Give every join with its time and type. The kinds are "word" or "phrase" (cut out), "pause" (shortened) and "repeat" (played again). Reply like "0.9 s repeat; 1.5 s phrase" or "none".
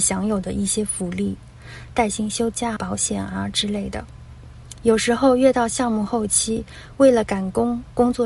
2.8 s word